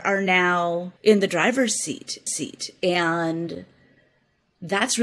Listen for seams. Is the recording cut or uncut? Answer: cut